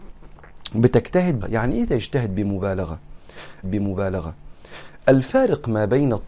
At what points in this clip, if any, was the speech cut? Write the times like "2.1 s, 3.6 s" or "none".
1.4 s, 3.6 s